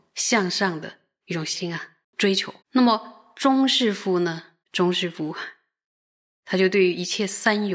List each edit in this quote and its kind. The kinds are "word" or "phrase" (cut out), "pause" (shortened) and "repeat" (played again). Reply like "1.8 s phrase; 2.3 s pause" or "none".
2.6 s pause; 4.6 s pause